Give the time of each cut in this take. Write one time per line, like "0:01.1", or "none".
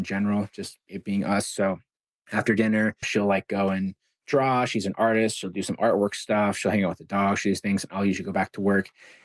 0:03.0